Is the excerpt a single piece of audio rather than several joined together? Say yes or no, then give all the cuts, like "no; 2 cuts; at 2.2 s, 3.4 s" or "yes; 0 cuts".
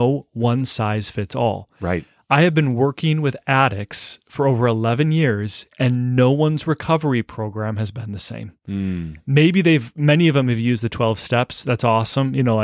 yes; 0 cuts